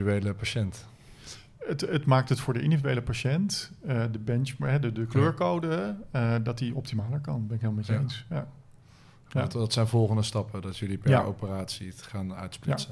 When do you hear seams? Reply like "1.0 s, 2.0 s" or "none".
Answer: none